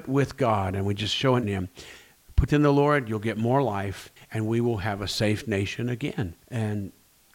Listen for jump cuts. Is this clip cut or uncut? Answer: cut